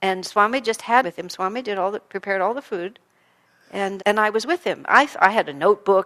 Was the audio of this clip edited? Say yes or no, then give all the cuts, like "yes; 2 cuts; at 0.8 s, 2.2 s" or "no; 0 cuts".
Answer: yes; 2 cuts; at 1.0 s, 4.0 s